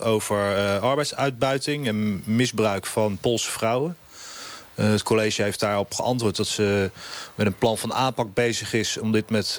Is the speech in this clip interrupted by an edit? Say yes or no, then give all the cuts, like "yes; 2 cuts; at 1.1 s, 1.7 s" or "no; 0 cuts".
no; 0 cuts